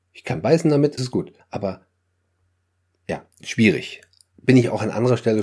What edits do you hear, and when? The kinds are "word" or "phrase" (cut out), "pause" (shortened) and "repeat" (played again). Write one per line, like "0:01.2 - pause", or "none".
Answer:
0:01.0 - word
0:01.4 - pause
0:03.3 - pause